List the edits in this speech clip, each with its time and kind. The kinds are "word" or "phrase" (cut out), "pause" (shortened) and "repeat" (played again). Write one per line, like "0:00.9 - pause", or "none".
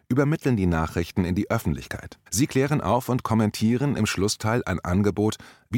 0:02.3 - pause